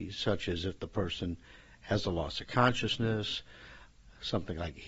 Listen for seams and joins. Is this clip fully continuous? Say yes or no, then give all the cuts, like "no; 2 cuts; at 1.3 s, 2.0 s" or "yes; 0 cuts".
yes; 0 cuts